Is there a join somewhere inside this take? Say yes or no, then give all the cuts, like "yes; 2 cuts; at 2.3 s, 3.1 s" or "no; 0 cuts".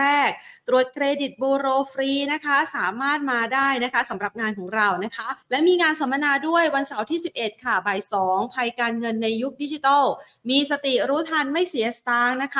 yes; 1 cut; at 5.4 s